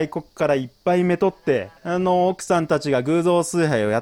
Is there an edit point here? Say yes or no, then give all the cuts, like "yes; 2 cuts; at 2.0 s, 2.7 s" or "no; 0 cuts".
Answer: yes; 1 cut; at 1.8 s